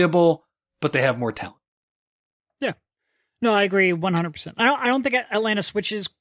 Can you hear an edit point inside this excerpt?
no; 0 cuts

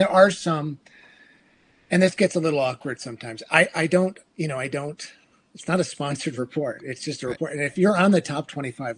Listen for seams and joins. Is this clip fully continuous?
yes; 0 cuts

